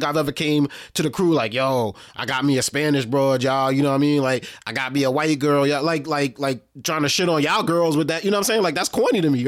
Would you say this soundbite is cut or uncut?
uncut